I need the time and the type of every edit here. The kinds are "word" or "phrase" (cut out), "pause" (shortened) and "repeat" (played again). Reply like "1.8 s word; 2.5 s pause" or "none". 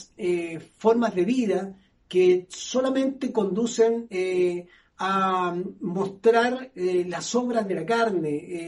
none